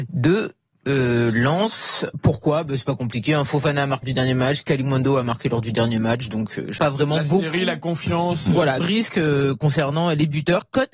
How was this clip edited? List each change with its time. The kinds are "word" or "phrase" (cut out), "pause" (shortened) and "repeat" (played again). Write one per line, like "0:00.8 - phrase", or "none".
0:04.0 - word
0:06.8 - word
0:08.8 - word